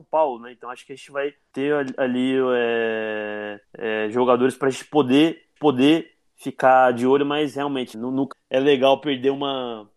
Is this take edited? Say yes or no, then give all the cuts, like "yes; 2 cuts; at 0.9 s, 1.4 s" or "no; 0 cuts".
yes; 5 cuts; at 1.5 s, 3.6 s, 5.6 s, 7.9 s, 8.3 s